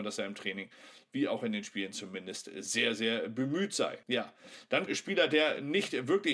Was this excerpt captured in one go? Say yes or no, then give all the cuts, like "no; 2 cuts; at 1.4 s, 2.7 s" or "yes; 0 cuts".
no; 2 cuts; at 4.0 s, 4.9 s